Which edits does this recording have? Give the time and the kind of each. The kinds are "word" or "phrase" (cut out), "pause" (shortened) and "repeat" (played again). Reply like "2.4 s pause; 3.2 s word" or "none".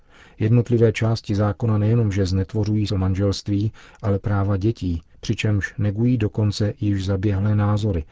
2.9 s word; 4.2 s word